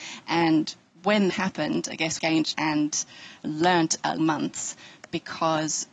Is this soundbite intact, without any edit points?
no; 5 cuts; at 1.3 s, 2.2 s, 2.5 s, 3.4 s, 4.2 s

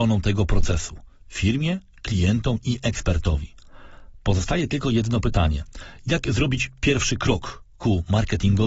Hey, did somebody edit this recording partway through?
no; 0 cuts

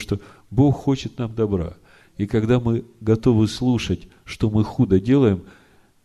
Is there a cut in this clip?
no; 0 cuts

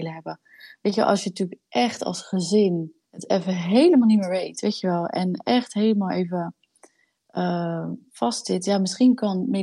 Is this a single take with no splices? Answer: no; 2 cuts; at 3.0 s, 8.1 s

